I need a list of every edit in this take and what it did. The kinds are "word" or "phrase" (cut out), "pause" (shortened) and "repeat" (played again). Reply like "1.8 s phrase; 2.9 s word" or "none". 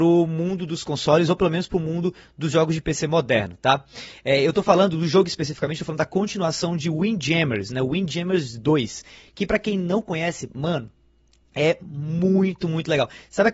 none